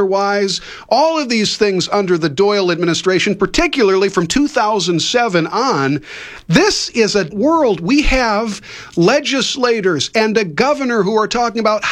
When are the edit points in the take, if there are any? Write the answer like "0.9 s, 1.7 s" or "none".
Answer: 7.3 s

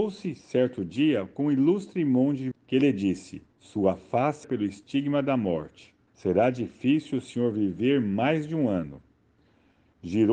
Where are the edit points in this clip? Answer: 2.5 s, 3.5 s, 4.4 s, 6.1 s

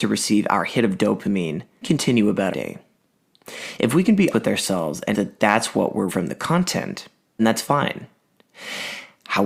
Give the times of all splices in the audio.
1.8 s, 2.5 s, 4.3 s, 5.1 s, 6.1 s, 7.4 s

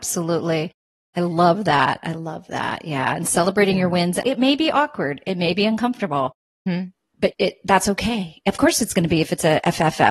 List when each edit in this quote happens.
4.2 s, 6.5 s, 7.3 s

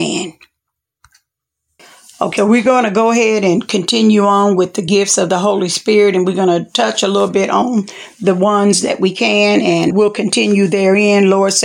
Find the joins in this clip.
2.4 s, 9.9 s

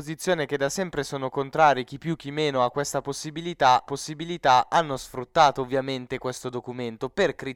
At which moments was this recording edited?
3.9 s

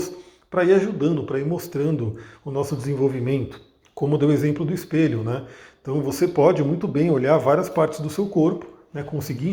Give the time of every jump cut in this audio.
none

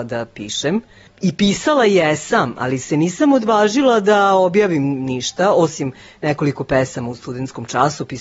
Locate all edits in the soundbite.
none

